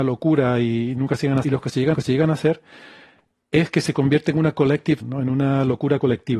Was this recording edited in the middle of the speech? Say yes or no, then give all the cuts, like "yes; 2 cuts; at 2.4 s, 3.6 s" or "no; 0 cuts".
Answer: yes; 3 cuts; at 1.4 s, 1.9 s, 5.0 s